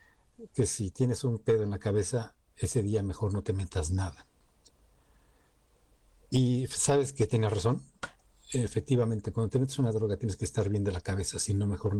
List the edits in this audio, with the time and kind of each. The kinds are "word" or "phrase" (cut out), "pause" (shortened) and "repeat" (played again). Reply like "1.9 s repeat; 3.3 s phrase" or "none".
none